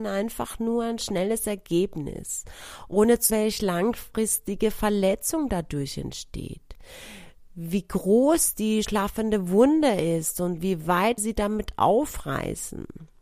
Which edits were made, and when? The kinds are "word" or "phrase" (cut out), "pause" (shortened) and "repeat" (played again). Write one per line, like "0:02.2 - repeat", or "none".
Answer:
0:03.3 - word
0:08.8 - word
0:11.2 - word